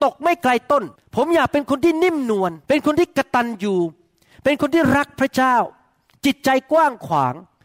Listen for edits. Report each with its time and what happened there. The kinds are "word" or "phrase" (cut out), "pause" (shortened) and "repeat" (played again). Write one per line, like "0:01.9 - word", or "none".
0:00.9 - pause
0:02.6 - pause